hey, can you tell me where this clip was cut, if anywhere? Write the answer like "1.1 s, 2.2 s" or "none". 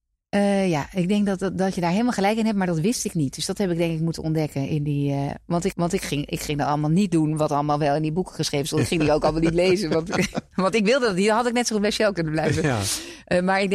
5.7 s